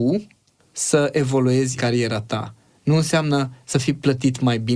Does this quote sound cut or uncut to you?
cut